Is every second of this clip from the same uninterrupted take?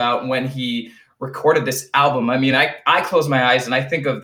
yes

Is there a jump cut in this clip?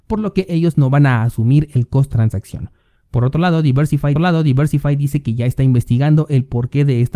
yes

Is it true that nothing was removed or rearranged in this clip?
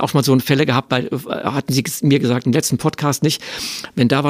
yes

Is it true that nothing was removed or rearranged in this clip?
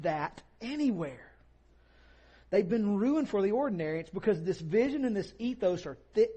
yes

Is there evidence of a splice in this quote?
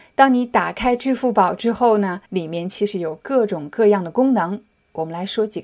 yes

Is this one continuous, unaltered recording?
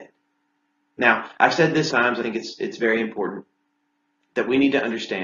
no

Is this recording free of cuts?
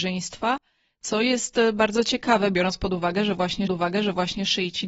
no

